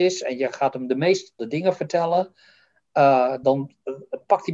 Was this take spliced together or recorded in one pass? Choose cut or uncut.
cut